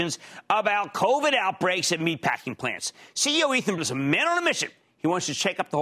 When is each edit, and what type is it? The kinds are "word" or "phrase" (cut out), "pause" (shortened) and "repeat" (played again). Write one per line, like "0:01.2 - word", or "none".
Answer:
0:03.8 - word